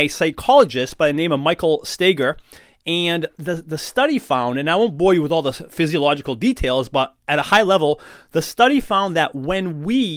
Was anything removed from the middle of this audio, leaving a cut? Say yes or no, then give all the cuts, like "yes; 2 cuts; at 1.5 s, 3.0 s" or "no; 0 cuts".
no; 0 cuts